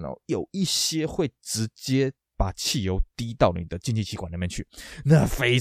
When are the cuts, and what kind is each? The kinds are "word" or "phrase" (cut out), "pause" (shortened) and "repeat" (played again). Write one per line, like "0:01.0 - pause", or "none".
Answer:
0:02.2 - pause